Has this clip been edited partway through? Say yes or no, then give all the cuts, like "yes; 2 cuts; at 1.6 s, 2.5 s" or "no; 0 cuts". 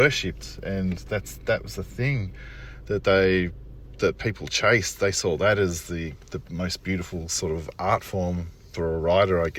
no; 0 cuts